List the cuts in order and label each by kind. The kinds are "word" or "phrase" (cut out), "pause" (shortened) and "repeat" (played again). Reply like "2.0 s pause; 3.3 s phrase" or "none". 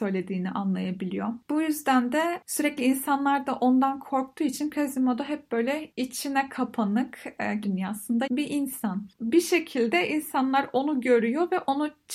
7.6 s word; 8.3 s word